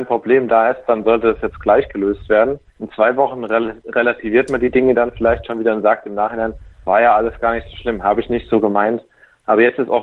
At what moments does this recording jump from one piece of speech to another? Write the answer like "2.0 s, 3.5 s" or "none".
2.7 s, 6.7 s

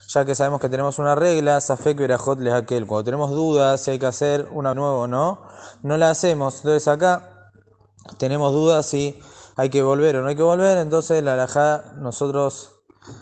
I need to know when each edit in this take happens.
4.7 s

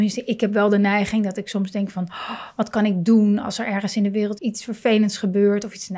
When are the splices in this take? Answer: 4.4 s

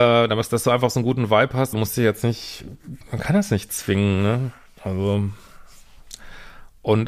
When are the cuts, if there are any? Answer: 1.7 s

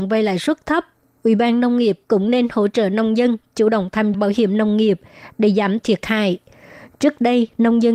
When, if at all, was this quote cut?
4.1 s, 5.8 s

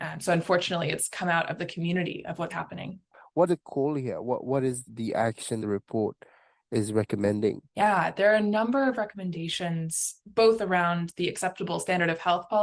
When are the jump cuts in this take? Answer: 2.5 s, 3.5 s, 4.9 s, 5.6 s, 7.7 s, 10.2 s

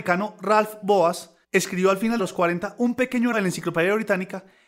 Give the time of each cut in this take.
1.4 s, 2.2 s, 3.3 s

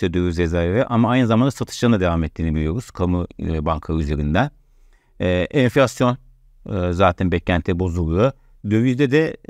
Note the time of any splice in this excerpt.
none

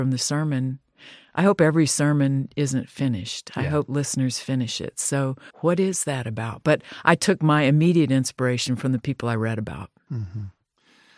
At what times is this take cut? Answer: 5.5 s

